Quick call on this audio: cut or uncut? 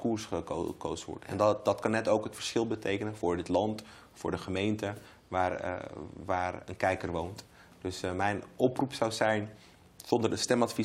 uncut